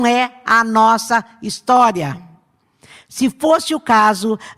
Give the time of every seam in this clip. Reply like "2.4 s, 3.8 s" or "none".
none